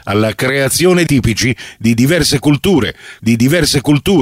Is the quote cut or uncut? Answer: cut